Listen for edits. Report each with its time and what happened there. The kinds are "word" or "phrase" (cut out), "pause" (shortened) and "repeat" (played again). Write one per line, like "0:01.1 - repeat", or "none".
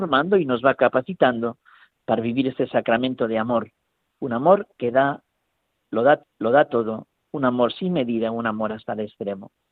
0:06.2 - repeat